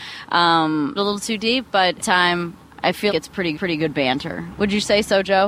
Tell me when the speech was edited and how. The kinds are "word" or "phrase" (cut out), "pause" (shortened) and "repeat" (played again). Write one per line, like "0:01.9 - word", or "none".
0:01.0 - phrase
0:02.0 - phrase
0:03.1 - word
0:03.5 - repeat